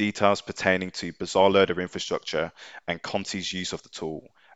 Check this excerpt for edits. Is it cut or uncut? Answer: uncut